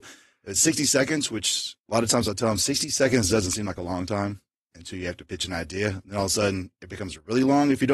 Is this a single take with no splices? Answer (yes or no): no